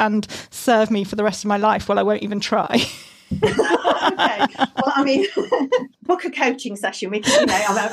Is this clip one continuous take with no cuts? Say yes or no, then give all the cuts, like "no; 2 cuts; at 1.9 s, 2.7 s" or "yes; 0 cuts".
no; 1 cut; at 5.9 s